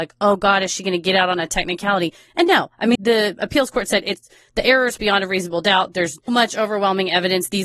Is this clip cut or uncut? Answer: cut